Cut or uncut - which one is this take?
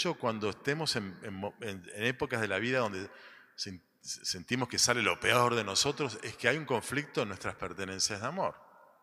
uncut